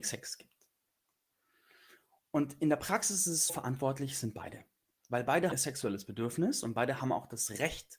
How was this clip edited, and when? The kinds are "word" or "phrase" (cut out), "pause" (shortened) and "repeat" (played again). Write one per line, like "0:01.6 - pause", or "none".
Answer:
0:03.5 - word
0:05.5 - word